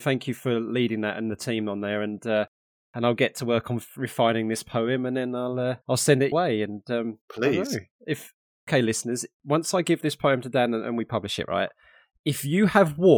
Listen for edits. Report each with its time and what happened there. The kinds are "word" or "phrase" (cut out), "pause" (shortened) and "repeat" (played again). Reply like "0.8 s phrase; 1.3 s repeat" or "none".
5.8 s pause; 6.3 s word; 7.2 s pause